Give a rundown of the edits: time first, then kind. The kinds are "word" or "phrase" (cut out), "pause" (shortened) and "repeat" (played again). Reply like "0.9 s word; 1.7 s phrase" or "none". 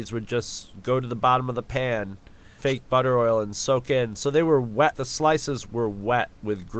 2.6 s phrase; 4.9 s word